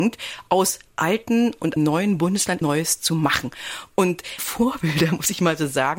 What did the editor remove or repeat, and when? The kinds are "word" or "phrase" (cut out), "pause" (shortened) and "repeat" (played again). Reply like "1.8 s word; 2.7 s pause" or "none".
1.8 s word; 2.6 s phrase; 4.4 s word